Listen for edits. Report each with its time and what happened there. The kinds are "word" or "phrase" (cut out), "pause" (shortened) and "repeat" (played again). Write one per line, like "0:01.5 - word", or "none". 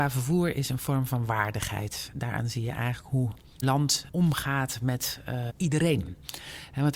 0:03.6 - word
0:04.1 - word
0:05.5 - word